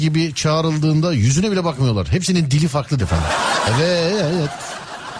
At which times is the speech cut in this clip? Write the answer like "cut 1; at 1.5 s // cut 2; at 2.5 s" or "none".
cut 1; at 3.0 s